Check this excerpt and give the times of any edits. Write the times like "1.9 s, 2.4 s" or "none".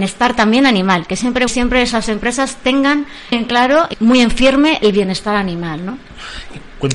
1.5 s, 3.3 s, 3.9 s